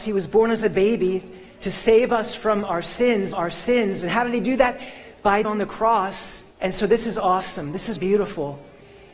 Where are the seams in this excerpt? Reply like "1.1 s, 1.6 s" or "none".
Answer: 3.3 s, 5.4 s, 6.5 s, 8.0 s